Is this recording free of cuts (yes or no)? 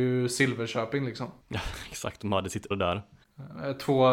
no